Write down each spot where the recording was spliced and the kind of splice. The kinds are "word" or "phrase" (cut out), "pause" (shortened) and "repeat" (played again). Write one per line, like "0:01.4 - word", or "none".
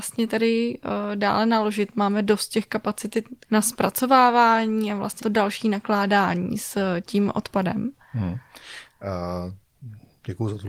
0:03.4 - word
0:05.2 - word